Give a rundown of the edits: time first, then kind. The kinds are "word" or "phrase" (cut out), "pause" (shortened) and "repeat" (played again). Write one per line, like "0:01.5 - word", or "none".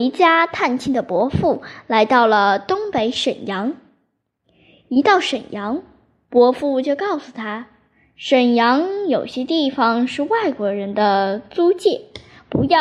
none